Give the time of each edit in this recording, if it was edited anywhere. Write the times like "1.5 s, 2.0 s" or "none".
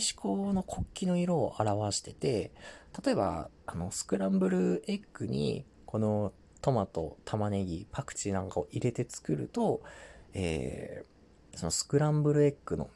none